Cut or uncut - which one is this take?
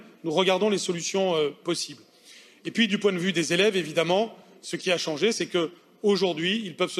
uncut